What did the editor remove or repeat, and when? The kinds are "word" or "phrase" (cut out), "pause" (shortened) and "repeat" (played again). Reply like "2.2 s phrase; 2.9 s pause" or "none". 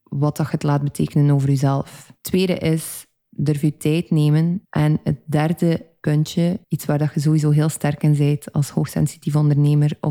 2.2 s pause; 4.6 s pause; 6.6 s pause